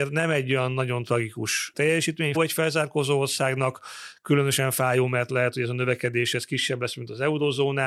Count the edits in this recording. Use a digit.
2